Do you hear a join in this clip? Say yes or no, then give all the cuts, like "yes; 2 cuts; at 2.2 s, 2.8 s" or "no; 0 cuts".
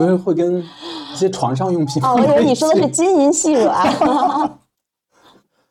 no; 0 cuts